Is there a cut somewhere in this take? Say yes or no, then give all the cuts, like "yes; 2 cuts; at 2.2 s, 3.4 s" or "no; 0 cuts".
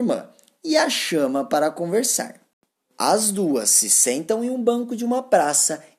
no; 0 cuts